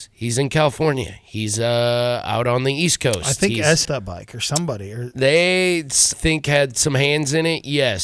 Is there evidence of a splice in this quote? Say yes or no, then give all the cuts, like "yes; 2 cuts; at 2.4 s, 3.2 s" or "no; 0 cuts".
yes; 2 cuts; at 3.8 s, 6.1 s